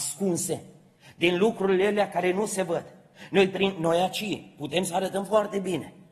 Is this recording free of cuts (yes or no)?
yes